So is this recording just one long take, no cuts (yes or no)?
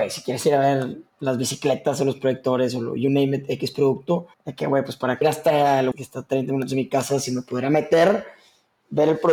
no